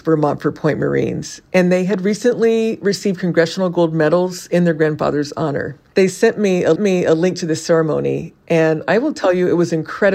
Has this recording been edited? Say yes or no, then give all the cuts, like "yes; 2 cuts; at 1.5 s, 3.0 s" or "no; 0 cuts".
yes; 1 cut; at 6.8 s